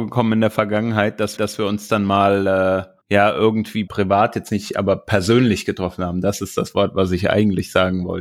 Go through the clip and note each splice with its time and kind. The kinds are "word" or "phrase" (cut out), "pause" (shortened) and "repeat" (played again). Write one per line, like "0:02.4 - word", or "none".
0:01.4 - repeat
0:03.0 - pause
0:03.9 - word